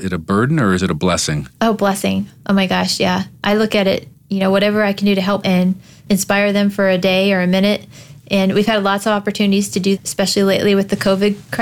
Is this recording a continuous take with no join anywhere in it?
no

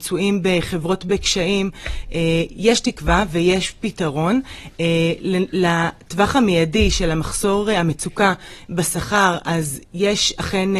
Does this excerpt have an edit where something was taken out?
no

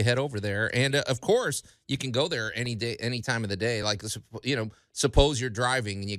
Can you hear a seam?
no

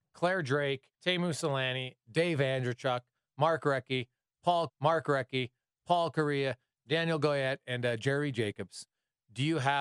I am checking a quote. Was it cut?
yes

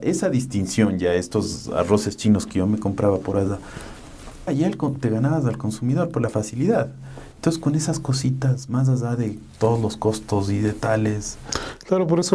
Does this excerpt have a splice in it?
yes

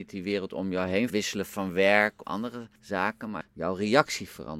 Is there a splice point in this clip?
yes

